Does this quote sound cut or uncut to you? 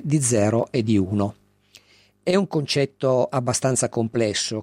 uncut